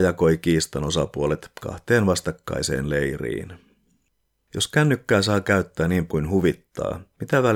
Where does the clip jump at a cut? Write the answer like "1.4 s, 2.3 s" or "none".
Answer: 6.1 s